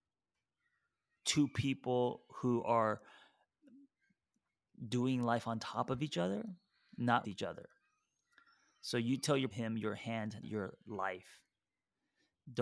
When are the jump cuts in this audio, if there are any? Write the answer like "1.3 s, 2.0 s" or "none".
7.2 s, 9.5 s, 10.4 s